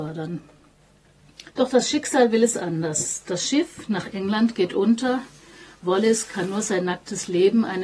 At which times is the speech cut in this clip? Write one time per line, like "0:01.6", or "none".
0:01.5